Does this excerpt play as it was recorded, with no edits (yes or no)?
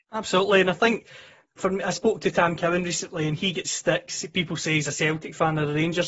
yes